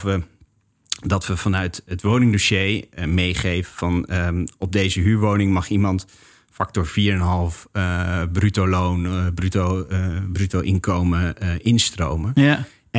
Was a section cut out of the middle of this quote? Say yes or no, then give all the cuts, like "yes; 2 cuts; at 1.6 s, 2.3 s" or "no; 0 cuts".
no; 0 cuts